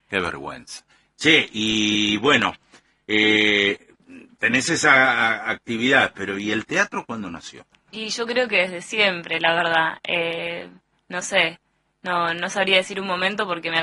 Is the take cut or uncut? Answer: uncut